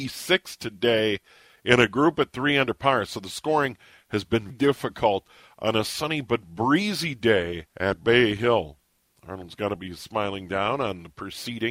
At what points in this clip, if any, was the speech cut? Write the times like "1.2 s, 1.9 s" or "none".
4.5 s, 7.7 s